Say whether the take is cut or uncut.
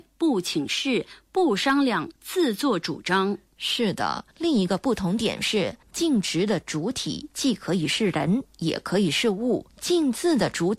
cut